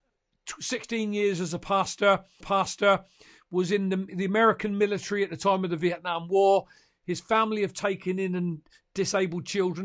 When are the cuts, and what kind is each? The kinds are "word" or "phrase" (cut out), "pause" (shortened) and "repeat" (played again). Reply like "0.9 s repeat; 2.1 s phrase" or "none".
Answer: 2.4 s repeat